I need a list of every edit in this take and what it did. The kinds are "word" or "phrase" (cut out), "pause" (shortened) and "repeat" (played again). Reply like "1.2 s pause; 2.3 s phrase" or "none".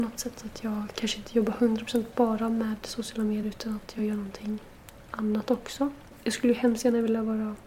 none